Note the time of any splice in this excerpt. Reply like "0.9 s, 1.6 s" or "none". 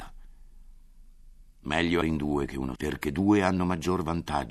2.0 s, 2.7 s